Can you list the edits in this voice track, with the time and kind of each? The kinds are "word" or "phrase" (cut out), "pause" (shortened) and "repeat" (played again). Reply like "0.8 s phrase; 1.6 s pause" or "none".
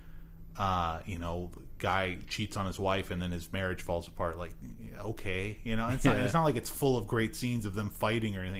none